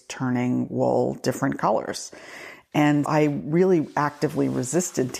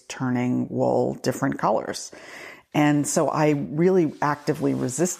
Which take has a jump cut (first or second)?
first